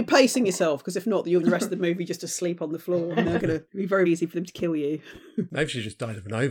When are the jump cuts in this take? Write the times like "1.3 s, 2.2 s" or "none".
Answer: 1.4 s, 3.2 s, 3.7 s, 4.1 s